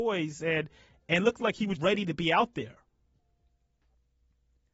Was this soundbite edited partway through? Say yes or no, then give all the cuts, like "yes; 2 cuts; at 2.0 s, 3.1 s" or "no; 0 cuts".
yes; 1 cut; at 1.8 s